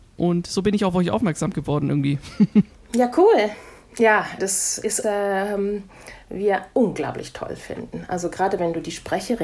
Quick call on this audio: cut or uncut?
cut